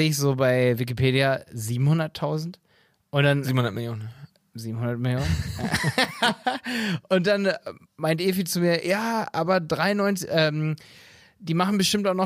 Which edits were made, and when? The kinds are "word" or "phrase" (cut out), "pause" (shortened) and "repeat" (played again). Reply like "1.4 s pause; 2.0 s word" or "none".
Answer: none